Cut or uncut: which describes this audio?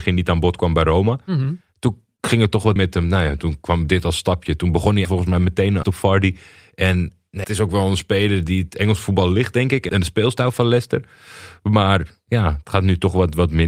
cut